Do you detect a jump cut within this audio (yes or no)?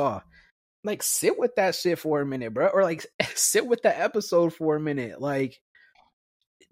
no